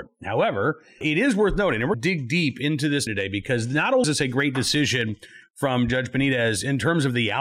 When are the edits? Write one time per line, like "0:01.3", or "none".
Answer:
0:01.0
0:01.9
0:03.1
0:04.0